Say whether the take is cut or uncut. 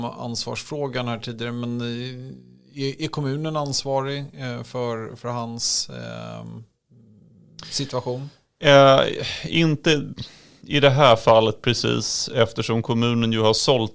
uncut